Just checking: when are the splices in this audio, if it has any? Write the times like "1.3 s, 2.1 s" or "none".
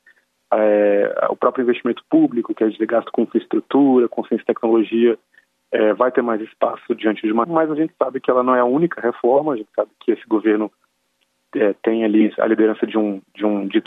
7.4 s, 9.9 s